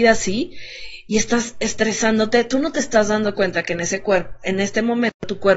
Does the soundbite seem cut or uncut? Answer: uncut